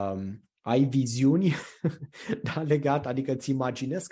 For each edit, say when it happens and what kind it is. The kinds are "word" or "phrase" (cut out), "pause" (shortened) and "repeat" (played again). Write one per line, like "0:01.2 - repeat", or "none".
none